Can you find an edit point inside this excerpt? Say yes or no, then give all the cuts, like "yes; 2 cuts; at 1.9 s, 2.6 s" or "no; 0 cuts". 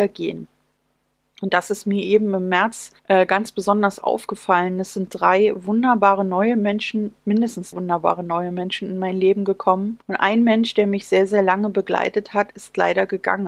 yes; 3 cuts; at 3.0 s, 7.7 s, 10.0 s